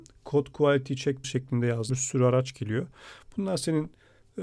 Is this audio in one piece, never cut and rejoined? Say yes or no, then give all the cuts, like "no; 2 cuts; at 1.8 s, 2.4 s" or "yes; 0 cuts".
no; 2 cuts; at 1.2 s, 1.9 s